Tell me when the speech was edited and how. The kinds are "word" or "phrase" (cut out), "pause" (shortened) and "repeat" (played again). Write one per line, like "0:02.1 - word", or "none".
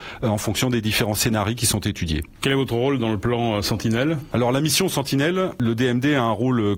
none